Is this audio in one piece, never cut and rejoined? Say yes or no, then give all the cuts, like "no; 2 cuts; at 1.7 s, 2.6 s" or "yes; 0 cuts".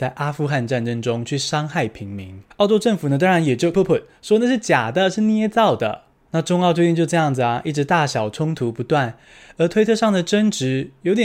no; 1 cut; at 3.7 s